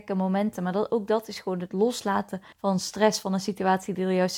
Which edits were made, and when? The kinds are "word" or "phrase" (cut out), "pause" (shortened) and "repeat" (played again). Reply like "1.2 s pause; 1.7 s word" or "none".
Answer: 2.5 s pause